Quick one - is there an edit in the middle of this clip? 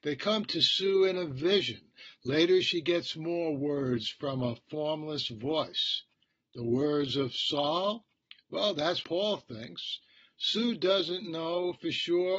yes; 1 cut; at 9.0 s

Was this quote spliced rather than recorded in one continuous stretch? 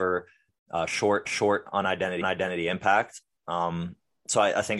yes; 2 cuts; at 1.3 s, 2.2 s

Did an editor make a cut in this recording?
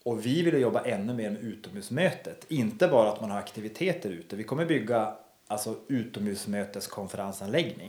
no; 0 cuts

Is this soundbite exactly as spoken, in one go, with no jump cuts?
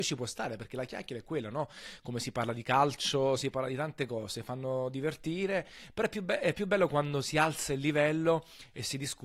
yes; 0 cuts

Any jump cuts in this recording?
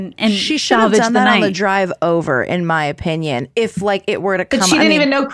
no; 0 cuts

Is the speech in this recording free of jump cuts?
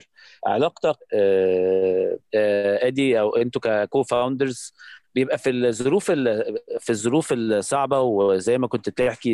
yes; 0 cuts

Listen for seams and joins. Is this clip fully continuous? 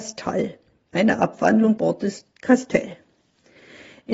no; 1 cut; at 1.8 s

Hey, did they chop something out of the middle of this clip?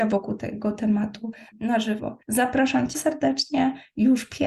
yes; 3 cuts; at 1.5 s, 2.2 s, 2.9 s

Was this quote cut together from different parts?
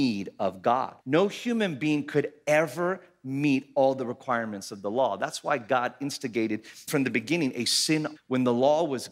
yes; 3 cuts; at 1.0 s, 6.9 s, 8.2 s

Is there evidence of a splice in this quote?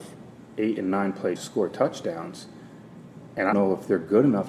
yes; 2 cuts; at 1.4 s, 3.5 s

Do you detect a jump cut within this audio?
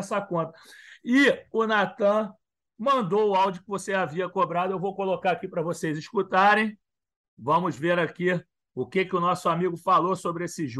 no; 0 cuts

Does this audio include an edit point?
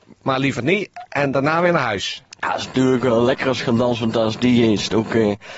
no; 0 cuts

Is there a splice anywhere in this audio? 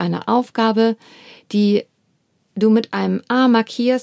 no; 0 cuts

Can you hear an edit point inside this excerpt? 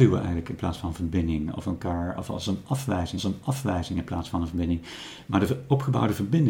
yes; 1 cut; at 3.2 s

